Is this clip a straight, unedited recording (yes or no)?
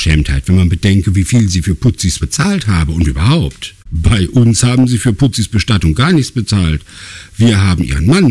no